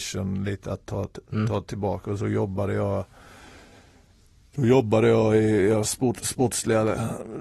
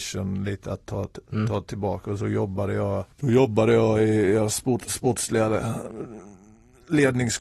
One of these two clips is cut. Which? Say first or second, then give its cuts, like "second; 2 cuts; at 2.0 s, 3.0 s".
second; 1 cut; at 3.1 s